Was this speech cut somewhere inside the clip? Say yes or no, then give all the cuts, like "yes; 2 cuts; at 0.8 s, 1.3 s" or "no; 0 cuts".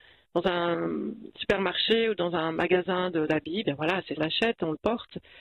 yes; 2 cuts; at 3.3 s, 4.2 s